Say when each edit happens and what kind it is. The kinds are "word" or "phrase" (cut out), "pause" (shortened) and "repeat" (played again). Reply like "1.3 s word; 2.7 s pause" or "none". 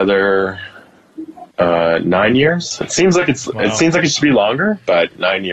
1.5 s pause

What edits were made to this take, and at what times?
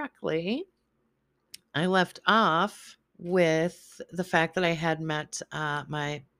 3.1 s pause

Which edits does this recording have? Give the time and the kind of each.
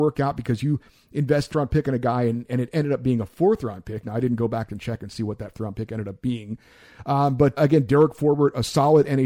1.5 s phrase; 5.5 s word; 7.6 s word

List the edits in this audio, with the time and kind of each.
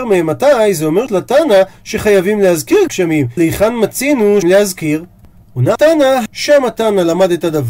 1.1 s word; 2.9 s word; 3.4 s word; 4.4 s word; 5.8 s word; 6.3 s word

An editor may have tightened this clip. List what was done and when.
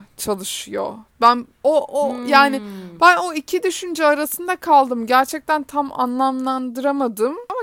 1.5 s pause

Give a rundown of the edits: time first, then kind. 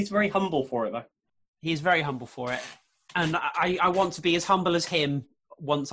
none

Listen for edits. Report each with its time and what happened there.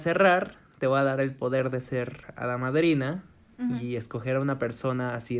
none

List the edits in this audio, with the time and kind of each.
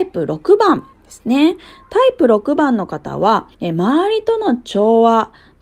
0.9 s pause; 3.5 s pause

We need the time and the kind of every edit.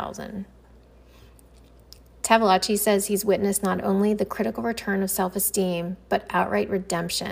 none

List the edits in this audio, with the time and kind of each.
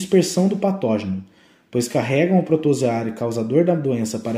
none

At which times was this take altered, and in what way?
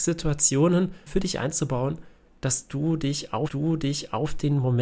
1.1 s word; 3.5 s repeat

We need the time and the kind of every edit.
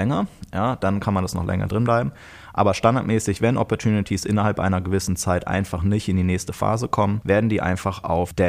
none

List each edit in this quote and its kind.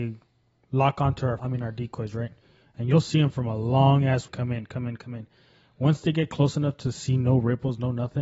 1.4 s word; 4.3 s word

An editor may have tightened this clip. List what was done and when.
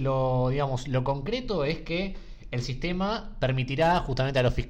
none

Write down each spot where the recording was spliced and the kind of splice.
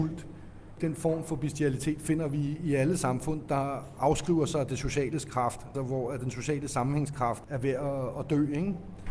5.7 s word

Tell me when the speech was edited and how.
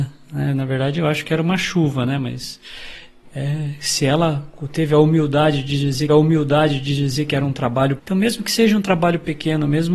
6.1 s repeat; 8.0 s word

